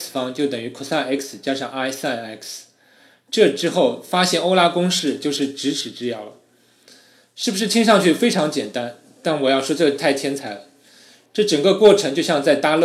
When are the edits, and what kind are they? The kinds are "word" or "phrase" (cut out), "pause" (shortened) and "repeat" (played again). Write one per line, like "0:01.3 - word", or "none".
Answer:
none